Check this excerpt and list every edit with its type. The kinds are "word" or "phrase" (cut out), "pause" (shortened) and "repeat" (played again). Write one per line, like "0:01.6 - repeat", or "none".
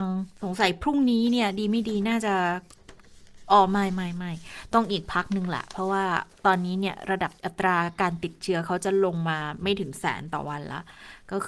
0:07.4 - pause